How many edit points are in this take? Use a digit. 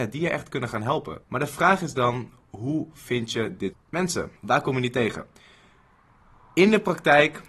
3